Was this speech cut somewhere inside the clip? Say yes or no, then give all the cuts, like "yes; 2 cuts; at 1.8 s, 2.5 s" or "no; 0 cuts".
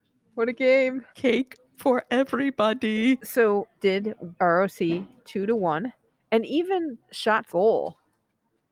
yes; 6 cuts; at 1.1 s, 3.8 s, 4.4 s, 6.1 s, 7.0 s, 7.5 s